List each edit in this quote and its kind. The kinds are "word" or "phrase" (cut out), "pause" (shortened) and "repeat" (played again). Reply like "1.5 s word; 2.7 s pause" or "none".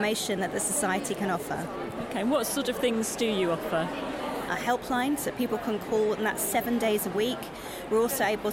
none